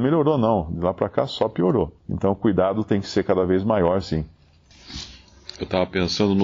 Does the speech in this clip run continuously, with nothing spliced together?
no; 1 cut; at 2.0 s

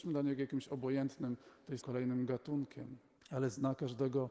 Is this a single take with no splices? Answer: no; 2 cuts; at 1.8 s, 3.2 s

